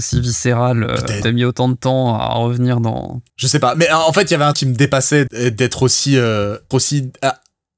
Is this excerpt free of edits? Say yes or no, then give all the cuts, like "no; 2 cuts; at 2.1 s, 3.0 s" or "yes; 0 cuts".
no; 6 cuts; at 1.2 s, 3.3 s, 3.7 s, 4.5 s, 5.3 s, 6.7 s